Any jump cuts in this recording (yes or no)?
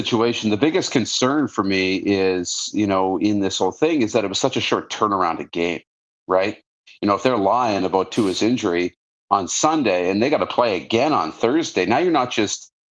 no